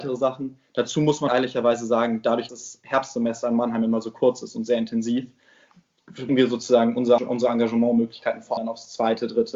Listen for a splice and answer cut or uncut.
cut